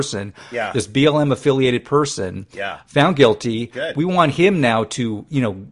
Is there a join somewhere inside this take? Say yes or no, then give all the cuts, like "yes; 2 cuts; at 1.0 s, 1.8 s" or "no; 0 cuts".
no; 0 cuts